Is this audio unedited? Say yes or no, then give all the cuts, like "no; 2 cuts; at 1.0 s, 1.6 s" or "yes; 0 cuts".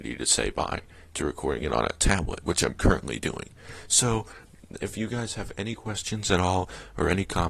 yes; 0 cuts